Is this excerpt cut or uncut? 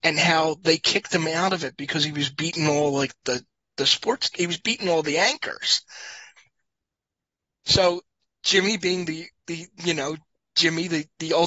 uncut